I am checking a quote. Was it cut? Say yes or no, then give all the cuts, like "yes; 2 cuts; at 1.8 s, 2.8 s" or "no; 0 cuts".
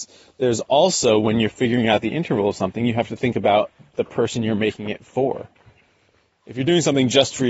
no; 0 cuts